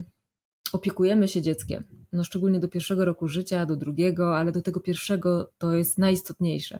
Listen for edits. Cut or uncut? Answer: uncut